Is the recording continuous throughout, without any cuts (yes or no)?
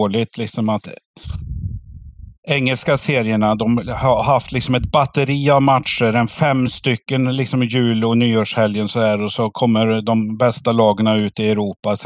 yes